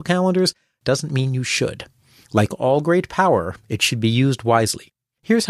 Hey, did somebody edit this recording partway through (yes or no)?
no